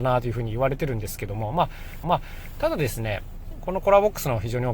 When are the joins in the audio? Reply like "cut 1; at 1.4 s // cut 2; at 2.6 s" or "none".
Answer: cut 1; at 2.0 s